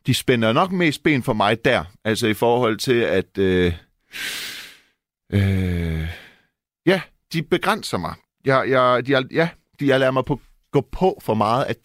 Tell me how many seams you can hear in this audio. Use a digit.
0